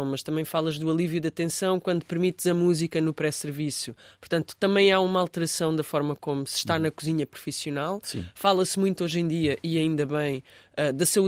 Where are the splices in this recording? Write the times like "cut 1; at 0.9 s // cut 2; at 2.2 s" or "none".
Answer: none